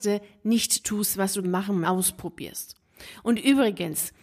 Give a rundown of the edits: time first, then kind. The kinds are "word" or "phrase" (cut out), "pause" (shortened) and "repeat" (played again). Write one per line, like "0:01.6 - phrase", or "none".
0:01.4 - word
0:01.8 - phrase